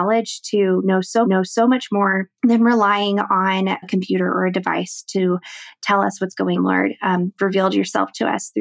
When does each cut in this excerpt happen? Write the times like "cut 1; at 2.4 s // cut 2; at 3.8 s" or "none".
cut 1; at 1.2 s // cut 2; at 2.4 s // cut 3; at 3.8 s // cut 4; at 6.6 s // cut 5; at 7.4 s